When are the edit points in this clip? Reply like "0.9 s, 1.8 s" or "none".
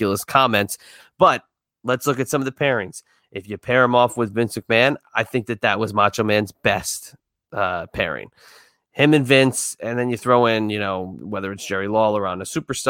none